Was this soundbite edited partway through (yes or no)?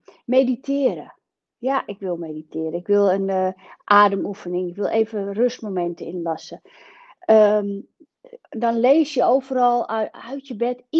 no